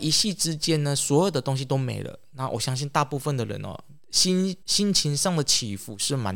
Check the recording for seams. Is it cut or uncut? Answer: cut